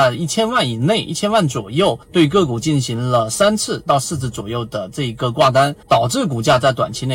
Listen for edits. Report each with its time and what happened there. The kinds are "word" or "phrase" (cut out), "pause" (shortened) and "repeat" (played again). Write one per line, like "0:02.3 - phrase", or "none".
0:02.0 - pause
0:05.8 - pause